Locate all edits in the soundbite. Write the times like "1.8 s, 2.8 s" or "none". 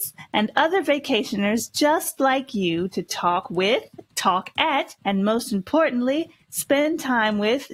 5.0 s